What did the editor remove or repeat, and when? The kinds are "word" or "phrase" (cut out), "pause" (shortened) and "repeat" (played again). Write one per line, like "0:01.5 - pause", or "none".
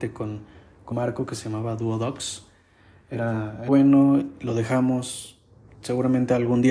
0:00.9 - phrase
0:03.7 - word